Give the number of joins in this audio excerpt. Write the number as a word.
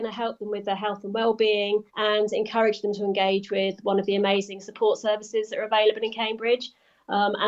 one